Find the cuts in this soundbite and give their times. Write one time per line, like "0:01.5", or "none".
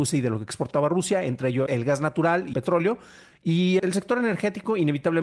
0:01.7
0:02.5
0:03.8